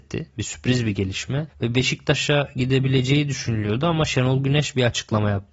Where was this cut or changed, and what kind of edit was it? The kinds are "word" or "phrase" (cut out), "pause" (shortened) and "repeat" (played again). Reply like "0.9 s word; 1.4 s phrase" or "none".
none